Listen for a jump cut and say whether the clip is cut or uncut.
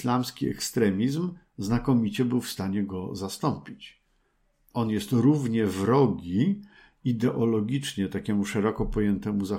uncut